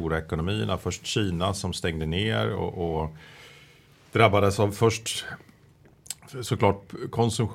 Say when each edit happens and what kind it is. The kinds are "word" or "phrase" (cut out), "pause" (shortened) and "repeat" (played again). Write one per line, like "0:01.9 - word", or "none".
none